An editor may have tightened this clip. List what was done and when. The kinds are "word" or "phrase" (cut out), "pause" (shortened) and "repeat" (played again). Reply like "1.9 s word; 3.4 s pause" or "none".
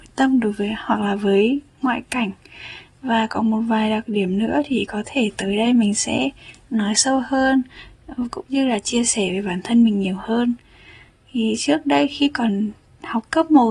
none